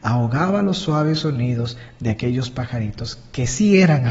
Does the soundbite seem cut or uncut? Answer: uncut